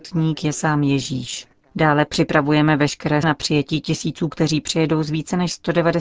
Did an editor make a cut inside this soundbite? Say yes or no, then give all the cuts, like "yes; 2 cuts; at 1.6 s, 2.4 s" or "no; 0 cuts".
yes; 2 cuts; at 3.2 s, 4.3 s